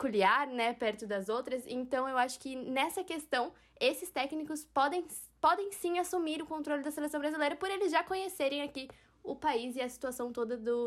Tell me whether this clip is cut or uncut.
uncut